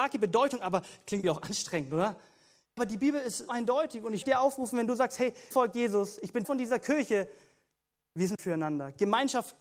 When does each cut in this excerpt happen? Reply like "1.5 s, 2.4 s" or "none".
1.2 s, 2.8 s, 3.5 s, 4.2 s, 5.5 s, 6.4 s, 8.4 s